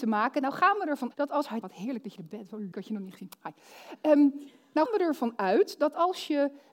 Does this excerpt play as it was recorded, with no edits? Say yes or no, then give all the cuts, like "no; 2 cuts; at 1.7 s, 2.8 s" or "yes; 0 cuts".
no; 4 cuts; at 1.1 s, 1.6 s, 2.7 s, 4.9 s